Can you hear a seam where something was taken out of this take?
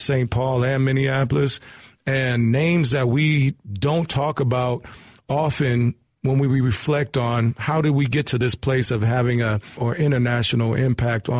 yes; 1 cut; at 9.8 s

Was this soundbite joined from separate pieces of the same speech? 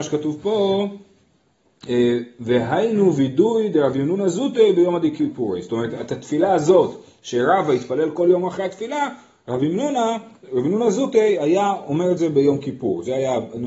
no; 0 cuts

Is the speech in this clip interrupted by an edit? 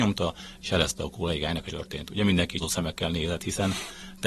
yes; 2 cuts; at 1.7 s, 2.6 s

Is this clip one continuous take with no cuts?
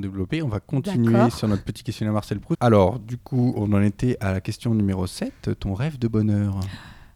yes; 0 cuts

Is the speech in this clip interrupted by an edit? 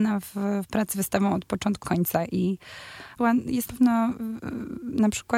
yes; 4 cuts; at 0.9 s, 1.8 s, 3.2 s, 3.7 s

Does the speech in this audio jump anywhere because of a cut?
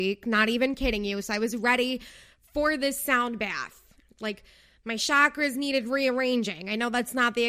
no; 0 cuts

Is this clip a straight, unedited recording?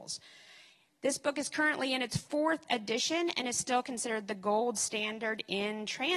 yes; 0 cuts

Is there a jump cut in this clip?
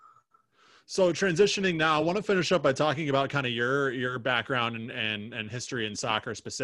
no; 0 cuts

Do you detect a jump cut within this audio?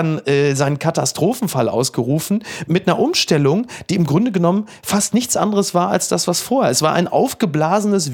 no; 0 cuts

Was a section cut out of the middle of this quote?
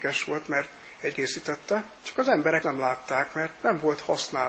yes; 3 cuts; at 1.1 s, 2.0 s, 2.6 s

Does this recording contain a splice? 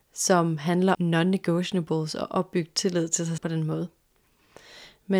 yes; 2 cuts; at 0.9 s, 3.4 s

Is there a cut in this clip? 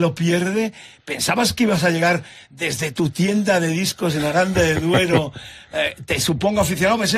no; 0 cuts

